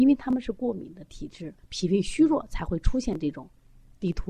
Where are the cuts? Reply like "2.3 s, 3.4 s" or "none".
1.6 s